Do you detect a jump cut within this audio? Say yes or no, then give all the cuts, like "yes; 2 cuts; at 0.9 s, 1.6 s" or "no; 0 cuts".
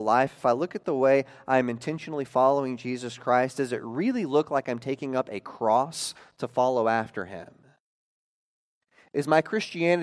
no; 0 cuts